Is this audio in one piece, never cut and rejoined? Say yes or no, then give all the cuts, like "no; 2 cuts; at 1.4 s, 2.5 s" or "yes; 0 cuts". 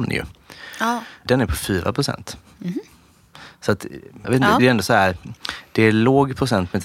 no; 2 cuts; at 4.2 s, 4.6 s